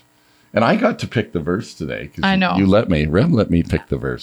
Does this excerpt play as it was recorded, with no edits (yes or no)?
yes